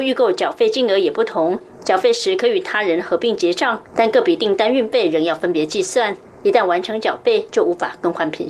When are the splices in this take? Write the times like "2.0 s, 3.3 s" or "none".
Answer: 3.9 s